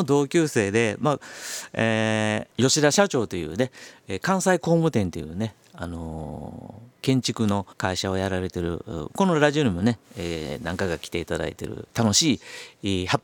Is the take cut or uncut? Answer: cut